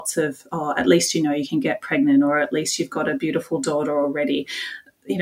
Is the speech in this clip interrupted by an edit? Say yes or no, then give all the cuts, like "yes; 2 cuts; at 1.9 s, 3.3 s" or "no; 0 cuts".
no; 0 cuts